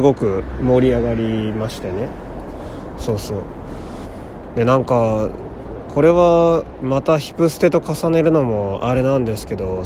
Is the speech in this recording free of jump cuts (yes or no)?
yes